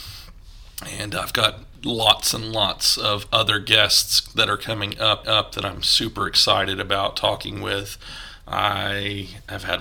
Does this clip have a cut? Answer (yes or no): yes